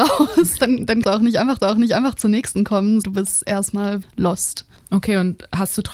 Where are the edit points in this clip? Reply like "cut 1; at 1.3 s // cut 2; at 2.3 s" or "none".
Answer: cut 1; at 1.0 s // cut 2; at 1.6 s // cut 3; at 3.0 s // cut 4; at 4.0 s // cut 5; at 4.8 s